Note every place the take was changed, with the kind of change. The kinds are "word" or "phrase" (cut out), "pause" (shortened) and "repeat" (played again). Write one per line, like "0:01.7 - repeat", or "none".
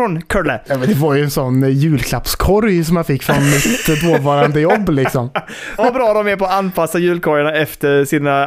0:05.8 - word